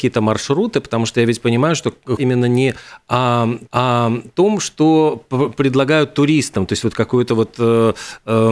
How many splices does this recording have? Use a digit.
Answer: 2